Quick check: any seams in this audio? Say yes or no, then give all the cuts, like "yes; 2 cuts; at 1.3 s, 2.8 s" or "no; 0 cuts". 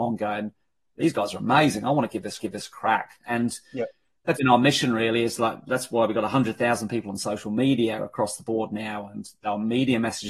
yes; 2 cuts; at 2.4 s, 4.3 s